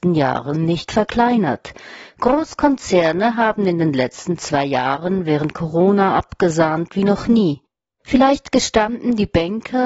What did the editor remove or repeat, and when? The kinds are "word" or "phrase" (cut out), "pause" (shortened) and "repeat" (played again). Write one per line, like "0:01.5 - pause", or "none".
none